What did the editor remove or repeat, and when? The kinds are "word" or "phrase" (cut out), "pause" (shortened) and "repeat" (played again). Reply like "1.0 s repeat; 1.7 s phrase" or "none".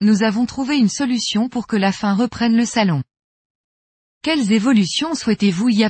none